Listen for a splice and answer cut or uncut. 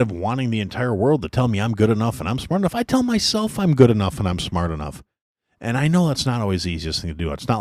uncut